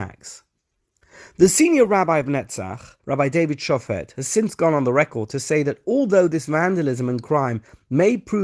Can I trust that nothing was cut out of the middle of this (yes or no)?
no